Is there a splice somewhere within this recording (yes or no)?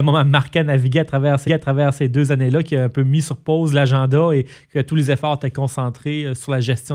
yes